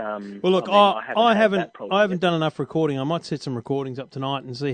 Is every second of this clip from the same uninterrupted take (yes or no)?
yes